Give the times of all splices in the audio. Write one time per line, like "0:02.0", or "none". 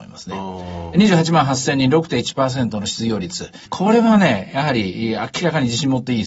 0:03.7